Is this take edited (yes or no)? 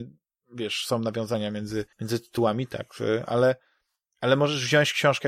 yes